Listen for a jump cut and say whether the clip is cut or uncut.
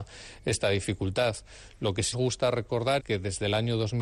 cut